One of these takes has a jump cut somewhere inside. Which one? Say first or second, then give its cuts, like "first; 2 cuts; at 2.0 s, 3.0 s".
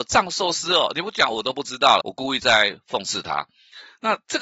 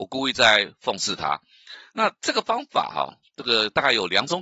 first; 1 cut; at 2.0 s